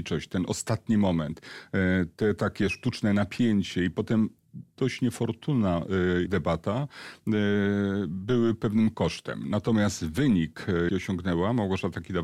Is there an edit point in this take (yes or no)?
yes